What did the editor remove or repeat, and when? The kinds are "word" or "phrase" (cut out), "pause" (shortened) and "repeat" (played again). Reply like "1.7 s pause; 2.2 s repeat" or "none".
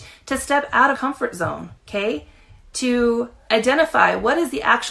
0.9 s word; 1.8 s pause